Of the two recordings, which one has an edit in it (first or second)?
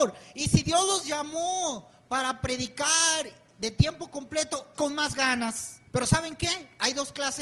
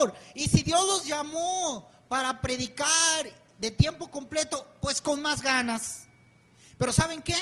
first